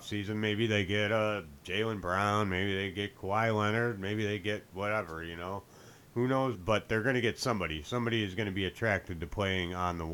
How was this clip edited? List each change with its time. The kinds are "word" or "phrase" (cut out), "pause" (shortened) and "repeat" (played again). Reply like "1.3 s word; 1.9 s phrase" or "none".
6.5 s phrase

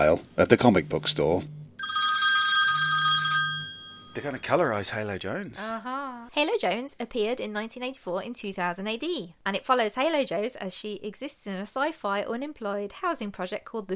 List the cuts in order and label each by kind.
none

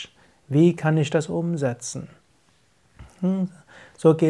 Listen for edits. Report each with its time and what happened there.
none

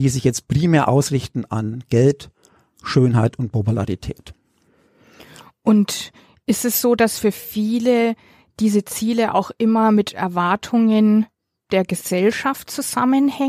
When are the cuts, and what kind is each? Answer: none

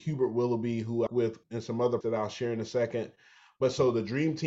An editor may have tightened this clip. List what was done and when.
1.1 s word; 1.4 s word; 2.0 s word

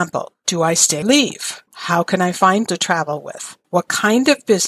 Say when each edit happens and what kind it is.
1.0 s word; 1.7 s pause; 2.7 s word; 3.6 s pause

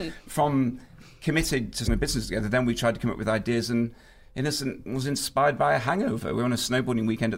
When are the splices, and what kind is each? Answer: 1.8 s word

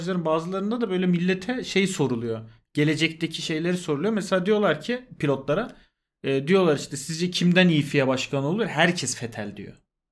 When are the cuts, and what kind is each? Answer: none

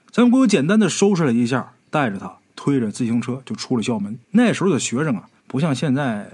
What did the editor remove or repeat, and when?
1.8 s pause; 4.2 s pause; 5.4 s pause

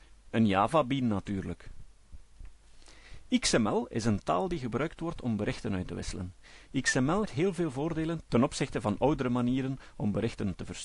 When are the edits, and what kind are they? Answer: 7.2 s word

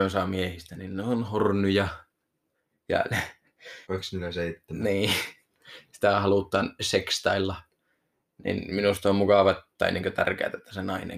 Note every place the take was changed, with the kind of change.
3.8 s pause; 9.7 s pause

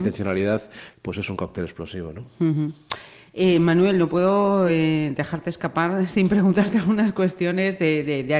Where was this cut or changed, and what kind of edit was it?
none

